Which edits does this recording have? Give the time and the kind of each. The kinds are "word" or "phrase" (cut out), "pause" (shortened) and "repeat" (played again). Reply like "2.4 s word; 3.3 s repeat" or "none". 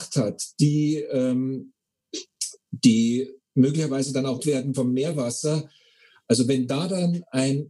4.4 s word; 4.7 s word